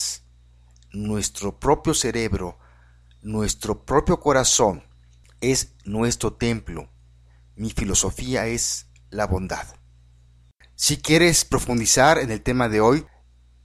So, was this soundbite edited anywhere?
no; 0 cuts

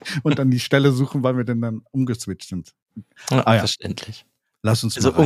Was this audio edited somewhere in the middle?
no; 0 cuts

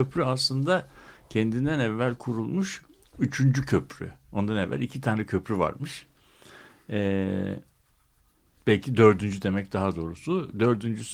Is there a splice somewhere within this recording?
no; 0 cuts

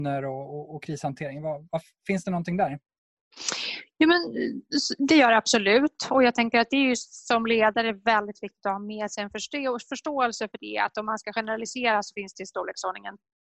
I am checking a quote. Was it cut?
no; 0 cuts

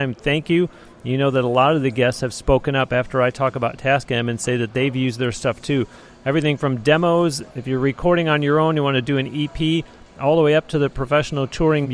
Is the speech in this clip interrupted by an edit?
no; 0 cuts

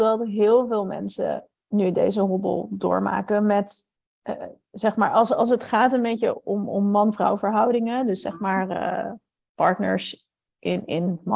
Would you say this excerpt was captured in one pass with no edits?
yes; 0 cuts

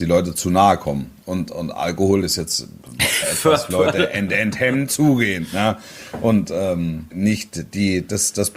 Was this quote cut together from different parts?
yes; 5 cuts; at 1.5 s, 3.2 s, 3.7 s, 4.9 s, 7.1 s

